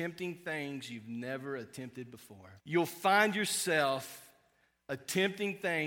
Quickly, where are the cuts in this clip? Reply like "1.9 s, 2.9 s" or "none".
2.6 s